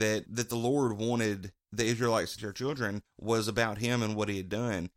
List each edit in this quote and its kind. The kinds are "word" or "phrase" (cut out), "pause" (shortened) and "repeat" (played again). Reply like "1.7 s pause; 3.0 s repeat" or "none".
1.6 s pause; 2.4 s word